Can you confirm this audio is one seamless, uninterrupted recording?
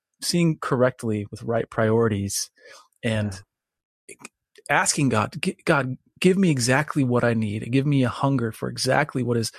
yes; 0 cuts

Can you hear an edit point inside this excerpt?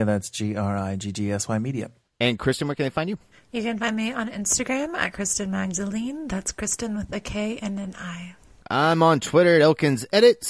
no; 0 cuts

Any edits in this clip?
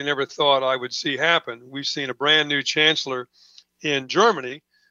no; 0 cuts

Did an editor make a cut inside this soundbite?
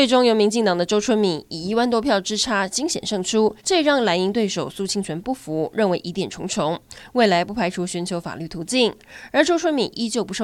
yes; 1 cut; at 3.6 s

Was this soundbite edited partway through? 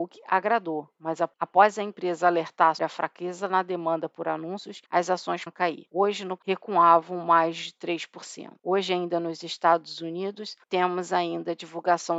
yes; 4 cuts; at 2.8 s, 4.9 s, 5.5 s, 6.4 s

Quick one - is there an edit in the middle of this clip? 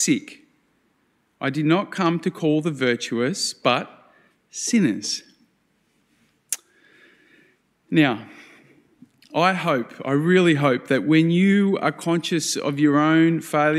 no; 0 cuts

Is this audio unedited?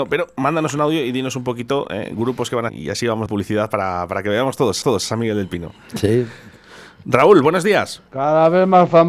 no; 3 cuts; at 2.7 s, 3.3 s, 4.8 s

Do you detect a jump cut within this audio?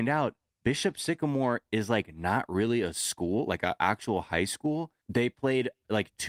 yes; 1 cut; at 5.0 s

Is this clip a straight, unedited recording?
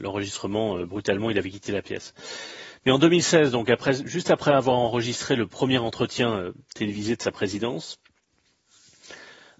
yes; 0 cuts

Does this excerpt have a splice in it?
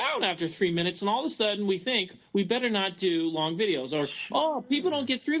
no; 0 cuts

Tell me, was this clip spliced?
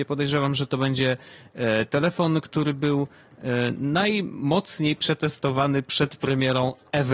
no; 0 cuts

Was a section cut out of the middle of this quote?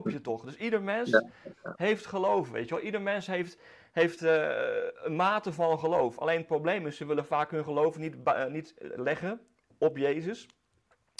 no; 0 cuts

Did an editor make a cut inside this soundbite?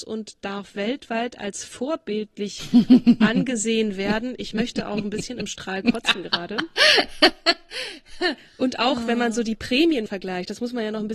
yes; 1 cut; at 10.1 s

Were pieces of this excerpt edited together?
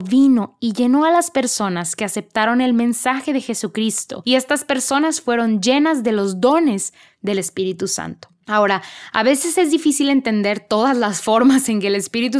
no; 0 cuts

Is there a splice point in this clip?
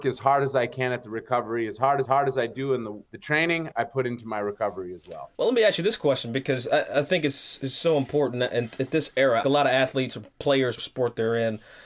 yes; 6 cuts; at 2.1 s, 3.1 s, 3.7 s, 5.3 s, 9.4 s, 10.8 s

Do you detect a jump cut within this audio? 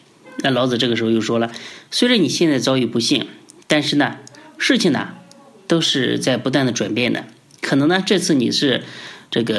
no; 0 cuts

